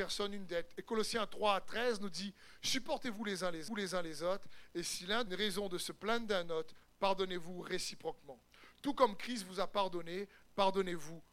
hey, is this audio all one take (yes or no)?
no